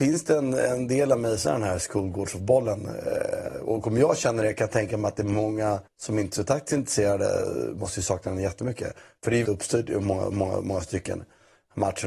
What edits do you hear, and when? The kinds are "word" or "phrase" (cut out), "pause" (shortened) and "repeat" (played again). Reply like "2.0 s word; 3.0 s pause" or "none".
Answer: 1.4 s word; 5.9 s pause; 9.4 s phrase; 10.3 s repeat